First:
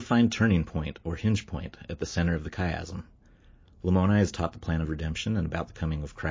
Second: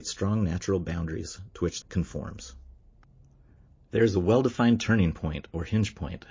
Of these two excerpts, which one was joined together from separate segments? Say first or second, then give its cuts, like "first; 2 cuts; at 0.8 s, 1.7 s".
second; 1 cut; at 1.8 s